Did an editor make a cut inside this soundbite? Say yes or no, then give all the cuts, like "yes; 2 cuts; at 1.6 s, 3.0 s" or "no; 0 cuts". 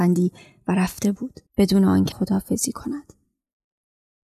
yes; 2 cuts; at 1.5 s, 2.1 s